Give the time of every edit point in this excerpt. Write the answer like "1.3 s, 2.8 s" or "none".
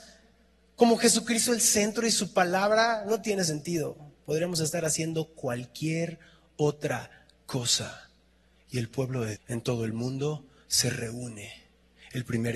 9.4 s

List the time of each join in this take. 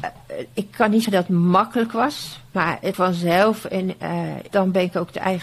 1.0 s, 2.9 s, 4.5 s

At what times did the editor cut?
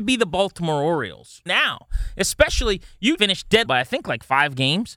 1.5 s, 3.2 s, 3.7 s

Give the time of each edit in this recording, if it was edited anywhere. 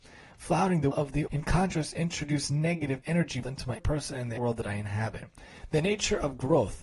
0.9 s, 1.3 s, 3.0 s, 3.4 s, 3.8 s, 4.4 s

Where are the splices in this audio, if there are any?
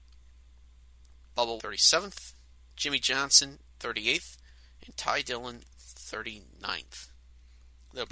1.6 s

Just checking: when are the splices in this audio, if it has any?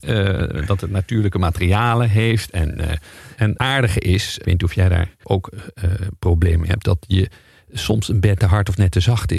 3.6 s, 4.4 s, 5.2 s, 8.4 s

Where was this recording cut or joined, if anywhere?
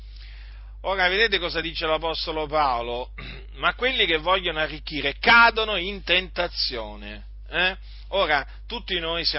none

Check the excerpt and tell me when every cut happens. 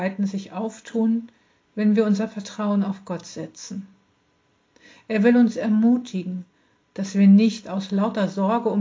none

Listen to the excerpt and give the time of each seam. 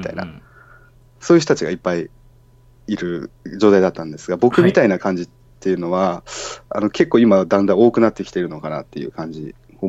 none

